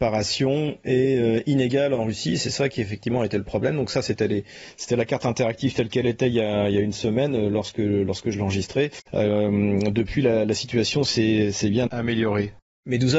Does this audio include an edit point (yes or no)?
yes